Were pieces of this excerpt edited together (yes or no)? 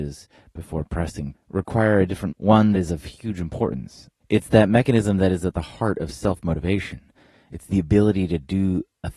yes